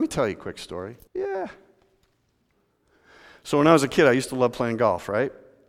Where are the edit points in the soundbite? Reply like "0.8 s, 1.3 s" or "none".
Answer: 1.1 s

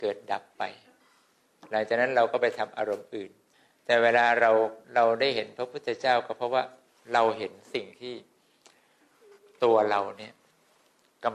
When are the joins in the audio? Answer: 3.5 s, 4.8 s

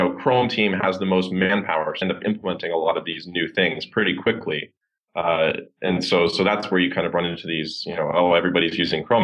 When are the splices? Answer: 2.0 s

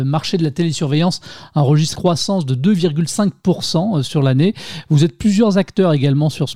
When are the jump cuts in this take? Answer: 1.9 s

